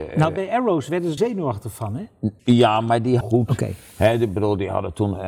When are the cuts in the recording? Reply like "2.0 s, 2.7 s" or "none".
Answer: 1.2 s, 2.4 s, 3.2 s